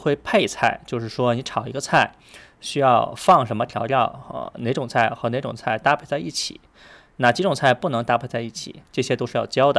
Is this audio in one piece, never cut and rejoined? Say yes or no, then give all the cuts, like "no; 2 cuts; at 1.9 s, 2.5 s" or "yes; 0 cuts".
no; 1 cut; at 8.9 s